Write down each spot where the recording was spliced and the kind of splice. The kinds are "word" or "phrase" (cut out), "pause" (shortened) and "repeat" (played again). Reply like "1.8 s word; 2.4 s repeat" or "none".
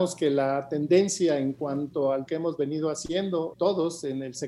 2.3 s word; 3.5 s word